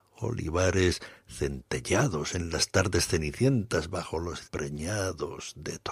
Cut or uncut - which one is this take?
cut